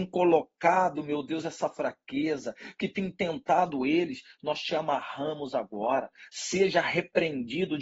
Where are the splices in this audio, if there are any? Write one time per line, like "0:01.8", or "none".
none